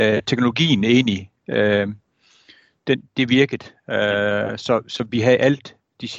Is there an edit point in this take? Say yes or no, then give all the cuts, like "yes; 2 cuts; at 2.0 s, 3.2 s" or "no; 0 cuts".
no; 0 cuts